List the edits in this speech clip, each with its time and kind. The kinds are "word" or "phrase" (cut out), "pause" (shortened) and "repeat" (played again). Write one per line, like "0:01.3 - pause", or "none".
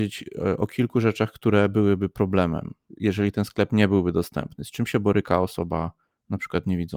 none